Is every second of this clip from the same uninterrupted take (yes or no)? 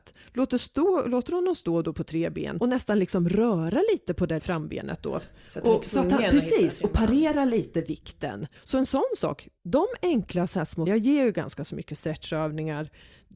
no